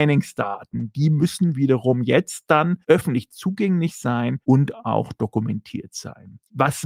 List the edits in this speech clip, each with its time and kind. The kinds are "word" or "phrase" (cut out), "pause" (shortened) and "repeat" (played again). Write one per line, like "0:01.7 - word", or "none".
0:02.8 - pause
0:04.4 - pause